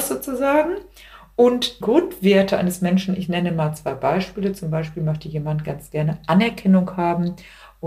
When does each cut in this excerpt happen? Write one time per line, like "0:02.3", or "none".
0:01.8